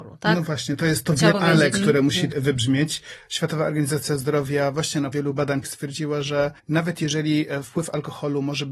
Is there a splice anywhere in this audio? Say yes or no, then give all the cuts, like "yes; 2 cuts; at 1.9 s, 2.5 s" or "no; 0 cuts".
yes; 5 cuts; at 1.3 s, 2.3 s, 5.1 s, 5.6 s, 6.6 s